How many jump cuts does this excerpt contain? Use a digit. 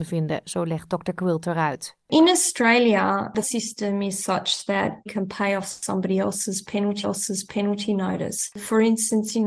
3